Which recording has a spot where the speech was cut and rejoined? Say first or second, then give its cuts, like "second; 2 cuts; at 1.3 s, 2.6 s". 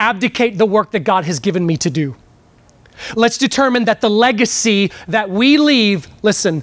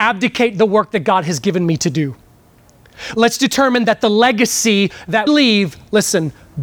second; 1 cut; at 5.3 s